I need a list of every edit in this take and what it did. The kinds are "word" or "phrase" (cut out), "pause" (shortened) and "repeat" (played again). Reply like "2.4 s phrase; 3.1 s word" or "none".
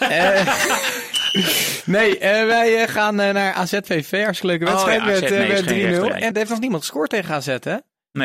6.3 s word